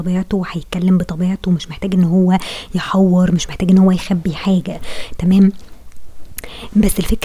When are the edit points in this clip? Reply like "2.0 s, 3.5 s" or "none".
none